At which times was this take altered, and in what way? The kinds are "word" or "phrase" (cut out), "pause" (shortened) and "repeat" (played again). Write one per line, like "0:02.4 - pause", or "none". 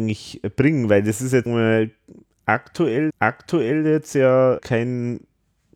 0:01.5 - word
0:03.1 - repeat
0:04.6 - word

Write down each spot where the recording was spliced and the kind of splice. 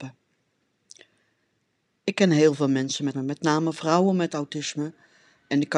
0:03.1 - word

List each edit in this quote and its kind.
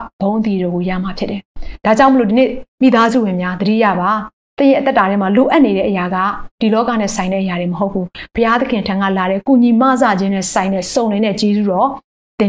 0:06.5 - pause

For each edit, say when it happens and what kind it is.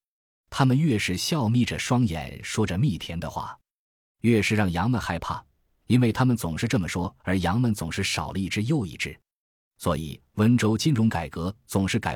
0:07.2 - pause

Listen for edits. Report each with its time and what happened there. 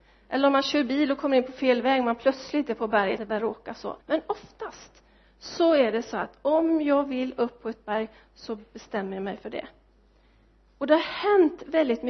0:03.2 - phrase
0:04.0 - pause

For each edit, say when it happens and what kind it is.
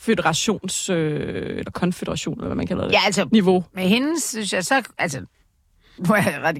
none

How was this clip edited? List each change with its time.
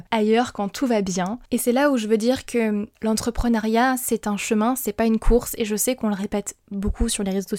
0:01.5 - pause
0:02.9 - pause

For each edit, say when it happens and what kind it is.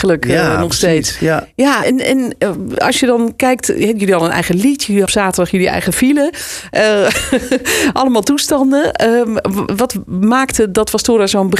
0:01.8 - word
0:05.1 - word
0:09.7 - word

